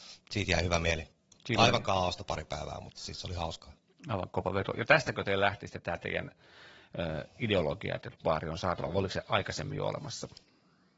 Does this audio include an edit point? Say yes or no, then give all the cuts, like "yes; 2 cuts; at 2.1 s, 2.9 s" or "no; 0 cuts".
no; 0 cuts